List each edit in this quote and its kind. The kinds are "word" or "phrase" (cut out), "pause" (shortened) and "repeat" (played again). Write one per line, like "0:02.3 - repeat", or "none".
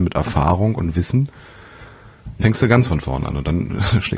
0:02.4 - word